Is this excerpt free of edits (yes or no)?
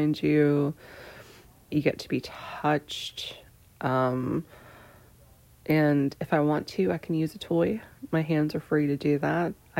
yes